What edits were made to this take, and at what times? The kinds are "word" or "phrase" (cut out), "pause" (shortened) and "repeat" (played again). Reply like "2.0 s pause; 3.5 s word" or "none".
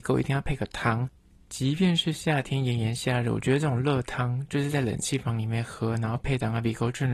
none